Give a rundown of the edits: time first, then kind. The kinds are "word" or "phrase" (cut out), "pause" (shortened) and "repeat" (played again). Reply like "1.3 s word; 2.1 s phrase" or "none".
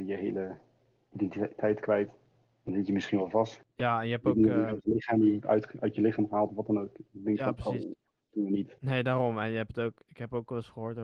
8.8 s pause